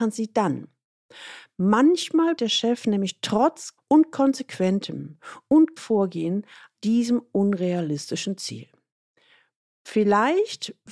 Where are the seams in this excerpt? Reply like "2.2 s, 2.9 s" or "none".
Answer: 2.4 s, 3.8 s, 5.8 s, 6.7 s

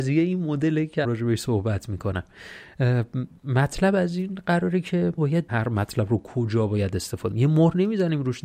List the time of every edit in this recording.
1.0 s, 5.2 s, 5.5 s, 7.3 s

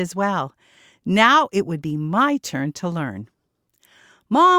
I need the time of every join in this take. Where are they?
none

